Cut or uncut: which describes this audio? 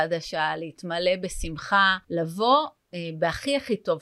cut